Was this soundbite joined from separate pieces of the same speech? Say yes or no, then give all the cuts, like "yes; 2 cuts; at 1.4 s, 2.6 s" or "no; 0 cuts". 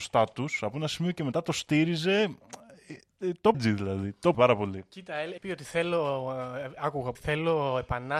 yes; 4 cuts; at 3.5 s, 4.3 s, 5.4 s, 7.1 s